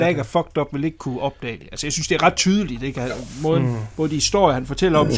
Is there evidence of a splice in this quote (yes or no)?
no